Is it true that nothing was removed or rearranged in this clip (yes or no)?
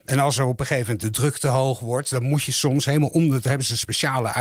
yes